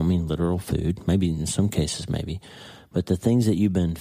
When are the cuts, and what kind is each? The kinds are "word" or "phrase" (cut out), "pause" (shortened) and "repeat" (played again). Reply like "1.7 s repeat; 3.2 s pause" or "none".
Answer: none